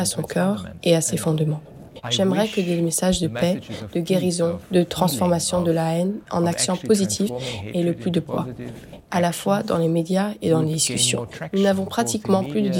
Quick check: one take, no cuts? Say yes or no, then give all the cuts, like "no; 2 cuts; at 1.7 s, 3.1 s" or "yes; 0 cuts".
yes; 0 cuts